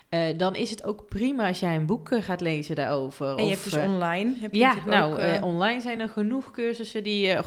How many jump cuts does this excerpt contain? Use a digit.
0